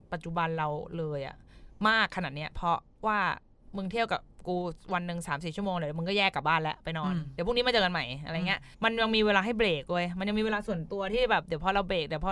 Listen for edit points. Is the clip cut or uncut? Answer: cut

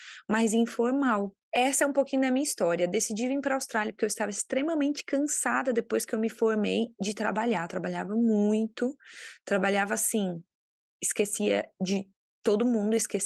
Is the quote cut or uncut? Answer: cut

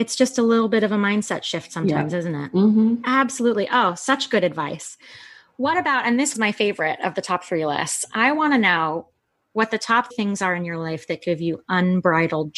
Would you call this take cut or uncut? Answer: cut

